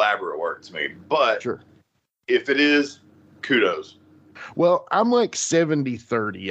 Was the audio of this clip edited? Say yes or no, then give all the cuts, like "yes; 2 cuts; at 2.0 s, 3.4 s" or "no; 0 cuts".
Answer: no; 0 cuts